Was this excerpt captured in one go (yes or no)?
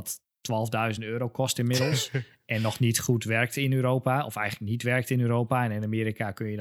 yes